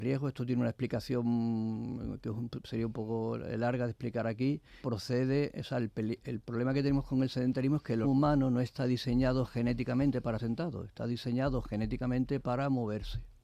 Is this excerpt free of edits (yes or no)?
no